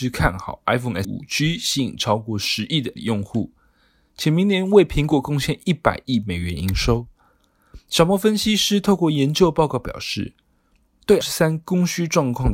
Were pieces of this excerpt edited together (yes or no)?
yes